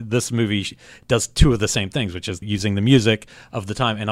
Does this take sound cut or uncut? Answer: cut